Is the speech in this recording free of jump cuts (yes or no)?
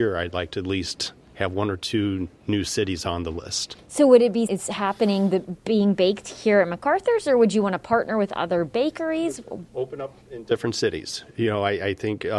no